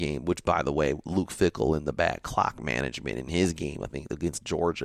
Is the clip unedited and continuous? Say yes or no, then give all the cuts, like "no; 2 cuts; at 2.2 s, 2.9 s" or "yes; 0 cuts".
yes; 0 cuts